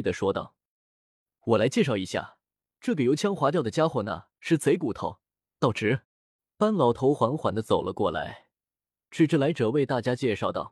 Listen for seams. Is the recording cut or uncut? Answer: cut